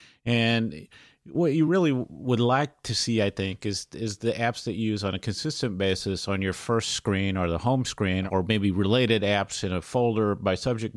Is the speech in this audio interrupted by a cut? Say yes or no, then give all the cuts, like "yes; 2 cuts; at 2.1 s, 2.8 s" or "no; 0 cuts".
no; 0 cuts